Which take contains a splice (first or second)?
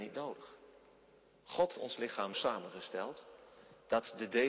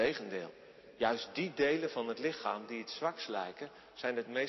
first